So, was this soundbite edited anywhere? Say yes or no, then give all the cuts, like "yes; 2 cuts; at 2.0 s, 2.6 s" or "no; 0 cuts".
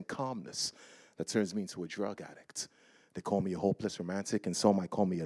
no; 0 cuts